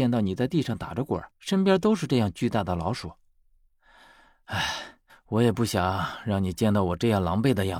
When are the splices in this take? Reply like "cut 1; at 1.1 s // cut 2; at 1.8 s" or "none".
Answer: cut 1; at 1.3 s // cut 2; at 5.1 s